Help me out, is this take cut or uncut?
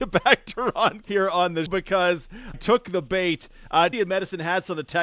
cut